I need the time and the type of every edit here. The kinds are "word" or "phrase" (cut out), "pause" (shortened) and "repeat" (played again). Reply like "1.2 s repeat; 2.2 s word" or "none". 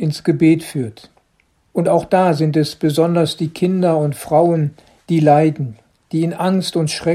1.5 s pause; 5.0 s pause; 5.9 s pause

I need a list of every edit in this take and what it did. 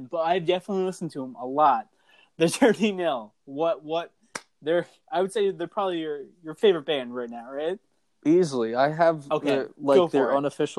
none

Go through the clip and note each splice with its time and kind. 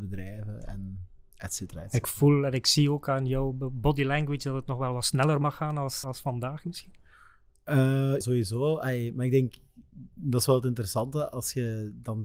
6.0 s word; 8.2 s word

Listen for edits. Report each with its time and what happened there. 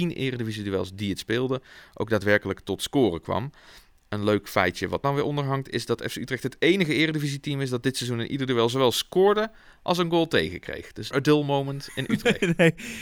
5.0 s word; 11.1 s word

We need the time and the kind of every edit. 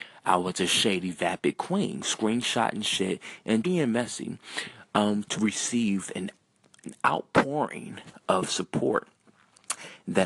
3.6 s word; 5.3 s phrase

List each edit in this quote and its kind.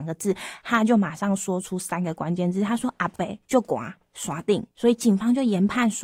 3.4 s pause; 4.7 s pause

